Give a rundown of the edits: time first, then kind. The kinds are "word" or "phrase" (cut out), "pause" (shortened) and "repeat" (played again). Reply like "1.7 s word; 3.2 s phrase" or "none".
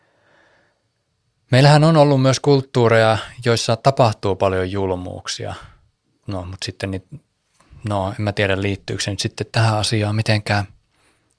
6.0 s pause